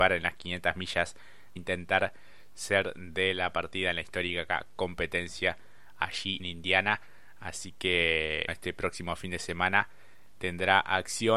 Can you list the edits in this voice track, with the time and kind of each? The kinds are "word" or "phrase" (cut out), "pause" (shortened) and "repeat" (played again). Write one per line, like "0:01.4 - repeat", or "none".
0:01.6 - phrase
0:06.4 - word
0:08.5 - word